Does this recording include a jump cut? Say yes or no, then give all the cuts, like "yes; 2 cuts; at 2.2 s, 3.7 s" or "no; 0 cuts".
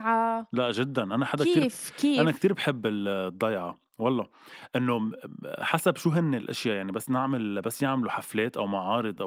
no; 0 cuts